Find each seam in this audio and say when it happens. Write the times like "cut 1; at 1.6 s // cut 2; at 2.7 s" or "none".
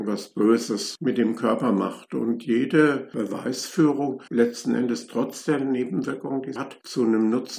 cut 1; at 4.3 s // cut 2; at 6.6 s